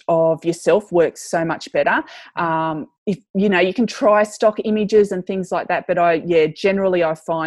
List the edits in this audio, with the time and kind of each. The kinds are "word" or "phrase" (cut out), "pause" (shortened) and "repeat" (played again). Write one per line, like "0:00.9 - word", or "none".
0:03.0 - pause